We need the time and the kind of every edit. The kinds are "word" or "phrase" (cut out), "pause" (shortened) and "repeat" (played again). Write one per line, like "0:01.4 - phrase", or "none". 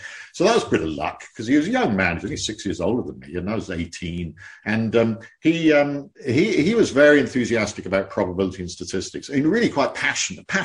0:06.1 - pause